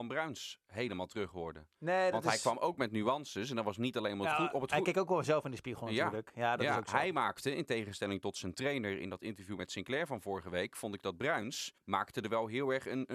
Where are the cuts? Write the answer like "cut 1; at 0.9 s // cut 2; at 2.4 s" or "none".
cut 1; at 11.8 s